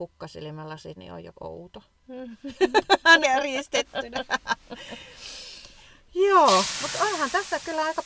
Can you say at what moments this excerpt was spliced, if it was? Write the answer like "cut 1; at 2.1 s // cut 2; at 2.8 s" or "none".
cut 1; at 1.0 s // cut 2; at 3.2 s